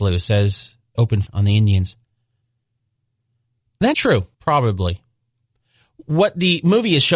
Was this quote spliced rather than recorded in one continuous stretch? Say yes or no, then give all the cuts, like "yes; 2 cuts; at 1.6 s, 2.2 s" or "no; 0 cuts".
yes; 4 cuts; at 0.9 s, 1.3 s, 3.9 s, 4.3 s